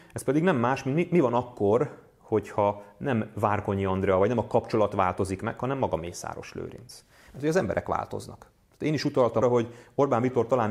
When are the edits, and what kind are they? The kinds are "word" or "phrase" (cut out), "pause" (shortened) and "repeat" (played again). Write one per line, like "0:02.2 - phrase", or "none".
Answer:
0:09.4 - word